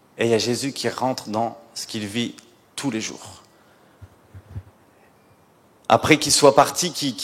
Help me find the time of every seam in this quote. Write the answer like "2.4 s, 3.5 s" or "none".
none